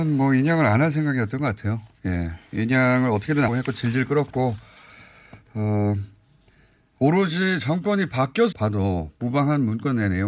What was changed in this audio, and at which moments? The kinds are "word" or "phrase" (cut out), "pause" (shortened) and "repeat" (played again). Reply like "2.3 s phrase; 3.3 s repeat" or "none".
3.5 s word; 8.5 s word